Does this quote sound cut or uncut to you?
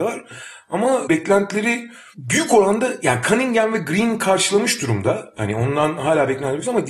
uncut